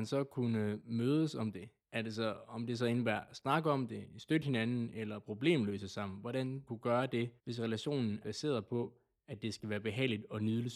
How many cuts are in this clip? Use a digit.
4